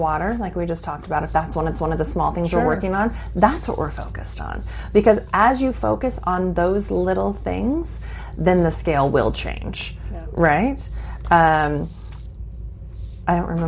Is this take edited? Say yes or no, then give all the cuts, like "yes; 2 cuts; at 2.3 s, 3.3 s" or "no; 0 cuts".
yes; 1 cut; at 1.7 s